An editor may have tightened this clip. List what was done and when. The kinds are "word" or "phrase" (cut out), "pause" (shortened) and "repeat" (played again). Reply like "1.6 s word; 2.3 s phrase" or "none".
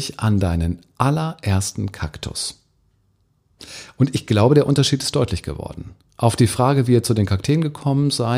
none